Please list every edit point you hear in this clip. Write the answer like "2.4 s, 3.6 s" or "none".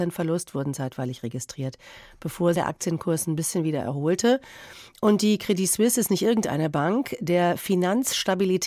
2.5 s

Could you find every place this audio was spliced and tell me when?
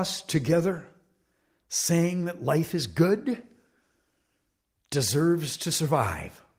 none

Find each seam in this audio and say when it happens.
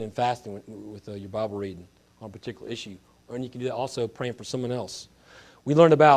none

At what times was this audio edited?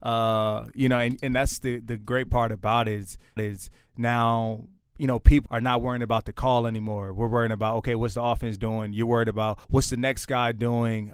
3.4 s, 5.5 s, 9.6 s

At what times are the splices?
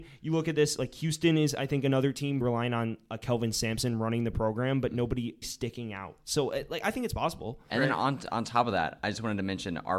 2.4 s, 5.4 s

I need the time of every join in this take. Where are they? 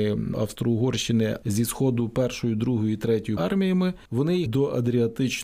1.4 s, 3.4 s, 4.1 s, 4.5 s

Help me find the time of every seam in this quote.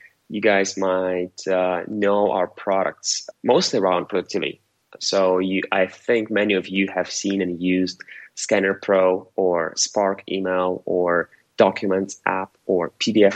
none

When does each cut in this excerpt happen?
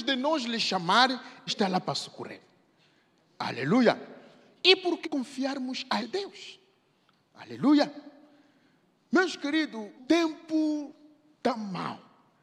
1.5 s, 5.0 s, 6.0 s, 10.0 s

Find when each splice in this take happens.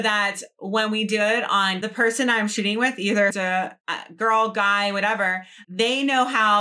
1.8 s, 3.3 s, 3.8 s, 5.6 s

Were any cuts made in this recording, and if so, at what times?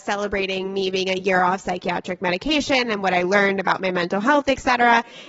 none

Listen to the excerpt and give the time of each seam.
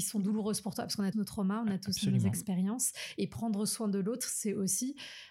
1.1 s

